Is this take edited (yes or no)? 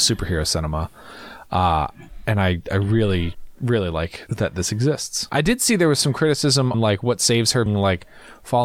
yes